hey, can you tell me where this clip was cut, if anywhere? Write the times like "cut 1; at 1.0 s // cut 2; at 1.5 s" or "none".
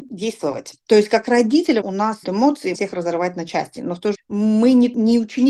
cut 1; at 1.8 s // cut 2; at 2.2 s // cut 3; at 2.7 s // cut 4; at 4.1 s